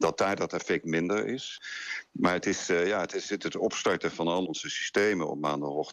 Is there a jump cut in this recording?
yes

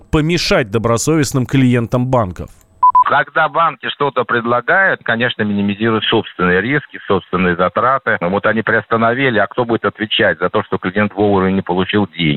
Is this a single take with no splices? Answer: yes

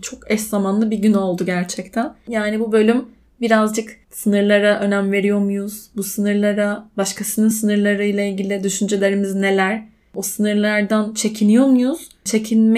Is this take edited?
no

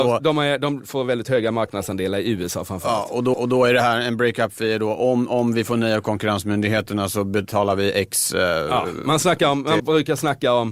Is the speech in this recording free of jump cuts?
no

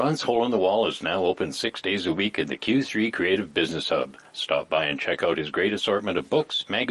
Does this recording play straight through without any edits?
yes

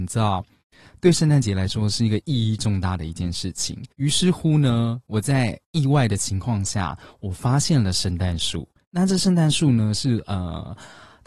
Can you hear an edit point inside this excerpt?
yes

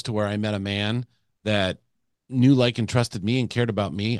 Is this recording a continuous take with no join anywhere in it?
yes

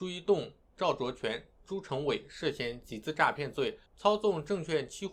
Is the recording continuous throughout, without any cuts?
no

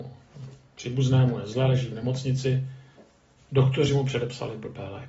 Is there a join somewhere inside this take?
no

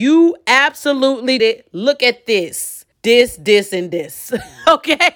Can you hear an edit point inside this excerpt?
yes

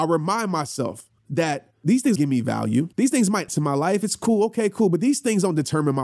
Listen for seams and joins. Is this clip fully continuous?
no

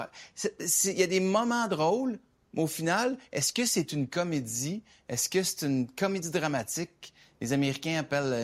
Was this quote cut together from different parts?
no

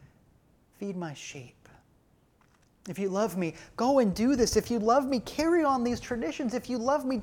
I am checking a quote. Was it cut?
no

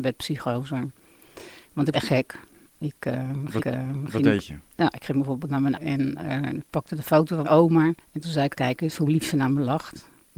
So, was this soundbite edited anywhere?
yes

